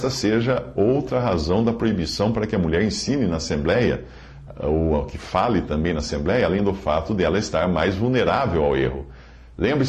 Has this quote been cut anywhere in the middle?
no; 0 cuts

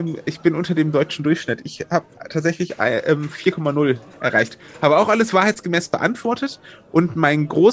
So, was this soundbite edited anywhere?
yes; 1 cut; at 4.1 s

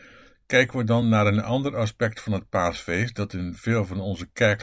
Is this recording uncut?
yes; 0 cuts

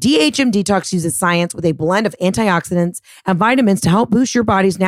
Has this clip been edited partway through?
no; 0 cuts

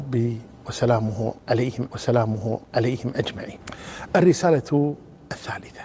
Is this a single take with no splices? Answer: no; 1 cut; at 1.9 s

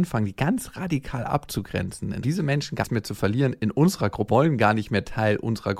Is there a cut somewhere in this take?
yes; 3 cuts; at 2.2 s, 2.8 s, 4.3 s

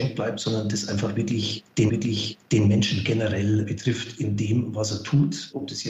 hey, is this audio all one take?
no; 1 cut; at 1.9 s

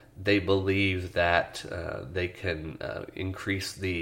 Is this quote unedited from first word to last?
yes; 0 cuts

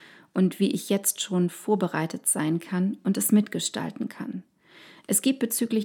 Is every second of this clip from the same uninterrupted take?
yes; 0 cuts

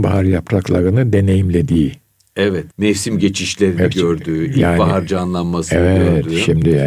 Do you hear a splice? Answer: yes; 1 cut; at 2.7 s

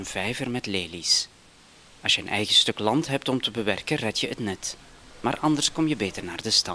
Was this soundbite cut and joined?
no; 0 cuts

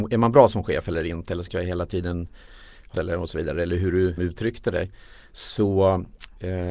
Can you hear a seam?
yes; 3 cuts; at 1.5 s, 2.9 s, 4.2 s

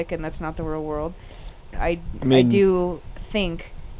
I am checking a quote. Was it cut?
yes; 1 cut; at 1.7 s

